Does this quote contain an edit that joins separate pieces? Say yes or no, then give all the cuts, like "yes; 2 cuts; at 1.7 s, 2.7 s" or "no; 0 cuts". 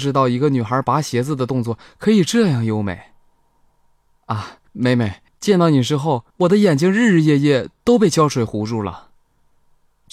yes; 3 cuts; at 4.7 s, 5.3 s, 6.3 s